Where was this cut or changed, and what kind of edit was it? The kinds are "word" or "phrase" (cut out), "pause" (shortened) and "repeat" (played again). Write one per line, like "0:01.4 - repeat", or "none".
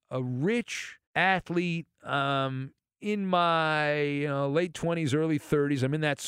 0:01.0 - pause